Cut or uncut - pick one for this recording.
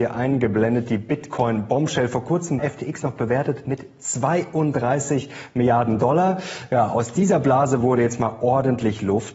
cut